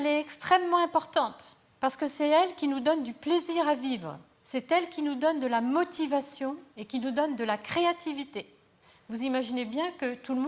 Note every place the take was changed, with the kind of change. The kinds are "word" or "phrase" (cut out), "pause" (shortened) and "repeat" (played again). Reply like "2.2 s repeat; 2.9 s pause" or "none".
4.3 s pause; 6.7 s pause